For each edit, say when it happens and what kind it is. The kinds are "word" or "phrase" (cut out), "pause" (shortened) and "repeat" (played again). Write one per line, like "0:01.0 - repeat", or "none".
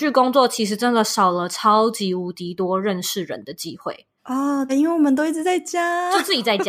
0:04.2 - pause
0:04.7 - word

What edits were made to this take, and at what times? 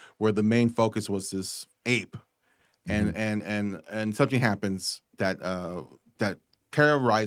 none

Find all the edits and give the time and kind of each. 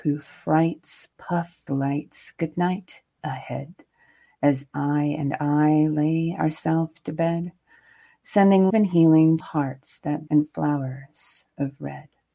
0:01.7 - phrase
0:08.7 - word
0:09.4 - phrase
0:10.3 - word

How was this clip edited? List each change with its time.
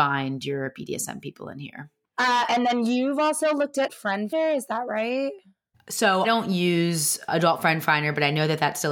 0:02.5 - word
0:03.9 - word
0:04.3 - word
0:06.2 - word
0:07.3 - word

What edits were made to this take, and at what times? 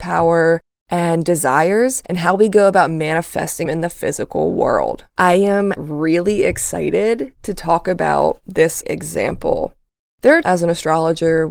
0:02.1 - pause
0:03.7 - word
0:05.1 - pause
0:05.8 - word
0:08.8 - word
0:10.4 - word

